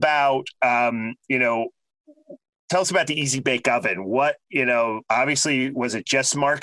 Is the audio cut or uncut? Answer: uncut